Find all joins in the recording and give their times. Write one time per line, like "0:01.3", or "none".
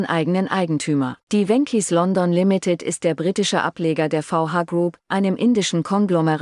0:01.2